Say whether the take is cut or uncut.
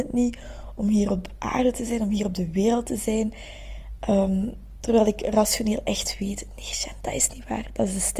uncut